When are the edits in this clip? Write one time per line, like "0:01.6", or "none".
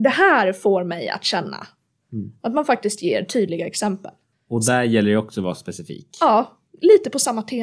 none